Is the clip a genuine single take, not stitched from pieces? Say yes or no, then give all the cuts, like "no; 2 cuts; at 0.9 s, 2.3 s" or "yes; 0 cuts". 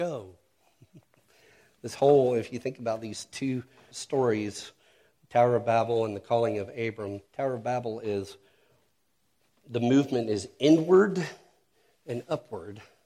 no; 3 cuts; at 3.9 s, 7.3 s, 9.6 s